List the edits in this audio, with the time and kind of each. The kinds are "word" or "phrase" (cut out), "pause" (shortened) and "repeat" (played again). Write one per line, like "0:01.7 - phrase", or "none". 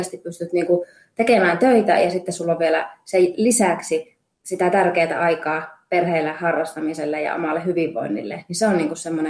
0:04.3 - pause